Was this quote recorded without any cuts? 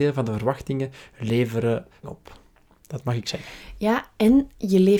no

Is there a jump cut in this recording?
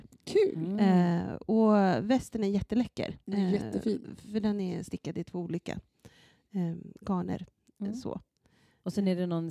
yes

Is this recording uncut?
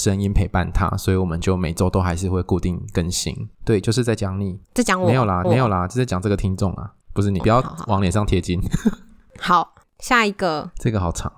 no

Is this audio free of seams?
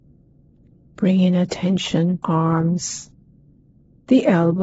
no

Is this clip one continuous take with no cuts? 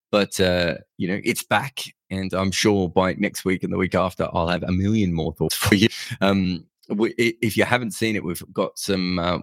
yes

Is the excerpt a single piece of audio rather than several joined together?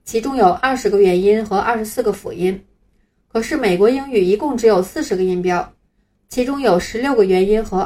yes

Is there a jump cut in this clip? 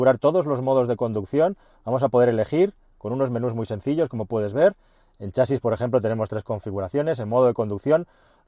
no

